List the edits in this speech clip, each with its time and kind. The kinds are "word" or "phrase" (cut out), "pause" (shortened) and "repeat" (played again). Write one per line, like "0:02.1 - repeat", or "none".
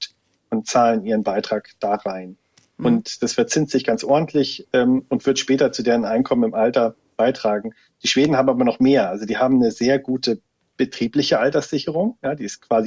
none